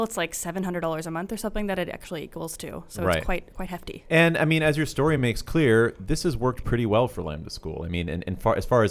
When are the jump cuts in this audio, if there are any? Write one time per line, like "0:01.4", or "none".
none